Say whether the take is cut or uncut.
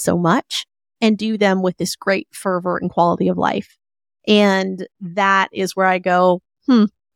uncut